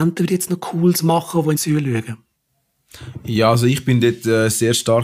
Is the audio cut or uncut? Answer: cut